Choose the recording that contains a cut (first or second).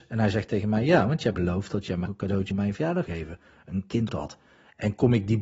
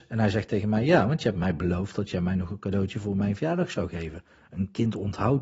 first